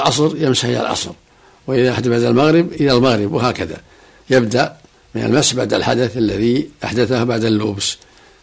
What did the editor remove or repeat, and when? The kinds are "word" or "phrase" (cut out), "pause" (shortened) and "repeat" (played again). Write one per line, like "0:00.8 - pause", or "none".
none